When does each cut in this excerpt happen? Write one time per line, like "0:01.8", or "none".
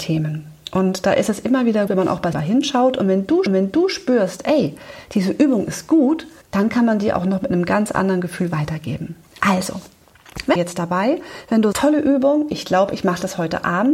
0:01.9
0:02.3
0:03.5
0:06.4
0:10.6
0:11.7